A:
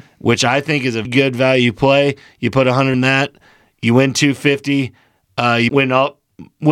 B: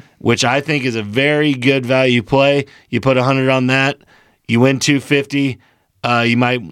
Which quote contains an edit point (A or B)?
A